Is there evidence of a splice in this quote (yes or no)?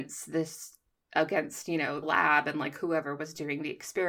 yes